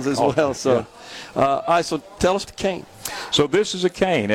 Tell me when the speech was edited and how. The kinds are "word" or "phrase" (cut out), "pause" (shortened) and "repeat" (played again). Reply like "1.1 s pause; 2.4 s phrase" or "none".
2.4 s word

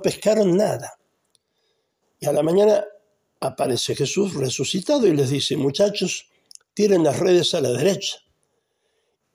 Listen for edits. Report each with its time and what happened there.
none

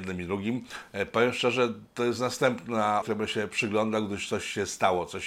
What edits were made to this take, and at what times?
3.0 s word

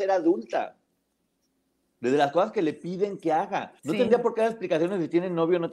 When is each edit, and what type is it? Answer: 3.8 s pause

